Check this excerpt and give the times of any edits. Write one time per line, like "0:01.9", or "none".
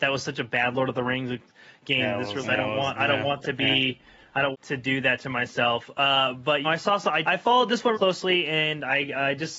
0:02.4
0:03.4
0:04.5
0:06.6
0:07.2
0:07.9